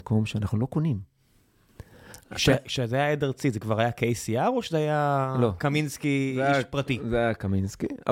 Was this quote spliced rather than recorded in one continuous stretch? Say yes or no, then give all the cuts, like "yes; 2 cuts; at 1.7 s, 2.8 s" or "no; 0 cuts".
no; 0 cuts